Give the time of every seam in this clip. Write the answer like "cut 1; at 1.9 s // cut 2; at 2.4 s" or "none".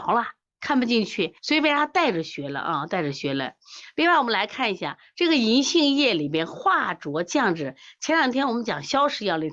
cut 1; at 1.4 s